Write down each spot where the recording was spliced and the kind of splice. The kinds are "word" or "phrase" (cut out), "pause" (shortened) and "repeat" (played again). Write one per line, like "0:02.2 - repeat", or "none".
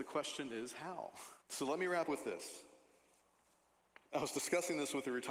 0:01.4 - pause
0:02.1 - word
0:04.1 - pause